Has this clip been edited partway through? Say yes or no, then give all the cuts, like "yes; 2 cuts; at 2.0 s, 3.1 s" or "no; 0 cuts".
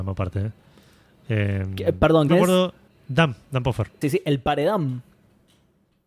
yes; 3 cuts; at 2.3 s, 2.9 s, 4.0 s